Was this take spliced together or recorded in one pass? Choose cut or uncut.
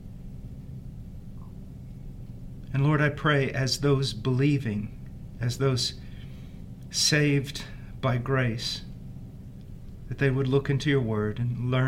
uncut